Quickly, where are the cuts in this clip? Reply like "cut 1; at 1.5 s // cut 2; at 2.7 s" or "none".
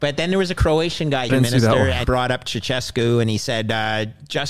cut 1; at 1.3 s // cut 2; at 2.0 s